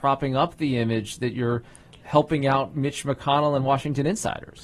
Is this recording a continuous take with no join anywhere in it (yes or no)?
yes